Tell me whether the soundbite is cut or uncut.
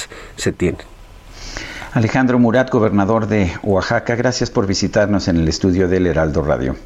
uncut